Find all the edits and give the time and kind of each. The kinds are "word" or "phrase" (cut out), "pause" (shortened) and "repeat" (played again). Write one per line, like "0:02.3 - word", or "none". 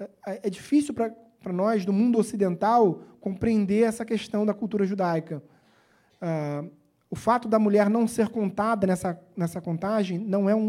none